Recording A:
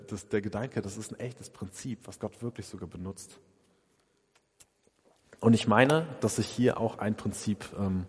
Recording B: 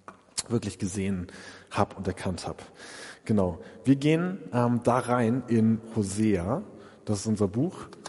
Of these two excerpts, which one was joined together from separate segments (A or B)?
A